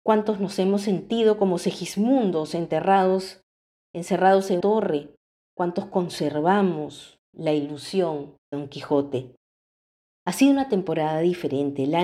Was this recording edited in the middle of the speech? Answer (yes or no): yes